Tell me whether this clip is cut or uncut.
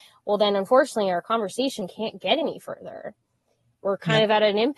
uncut